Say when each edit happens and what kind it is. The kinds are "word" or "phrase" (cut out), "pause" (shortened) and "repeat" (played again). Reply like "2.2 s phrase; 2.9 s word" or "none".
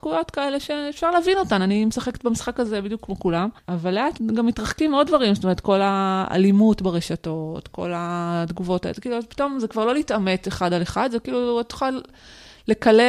3.6 s pause; 4.2 s word